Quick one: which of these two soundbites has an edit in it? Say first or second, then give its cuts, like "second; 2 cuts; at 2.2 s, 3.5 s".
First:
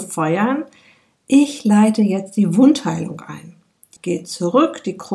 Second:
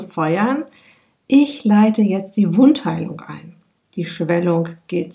first; 1 cut; at 4.0 s